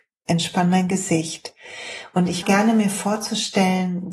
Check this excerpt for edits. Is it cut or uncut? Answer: cut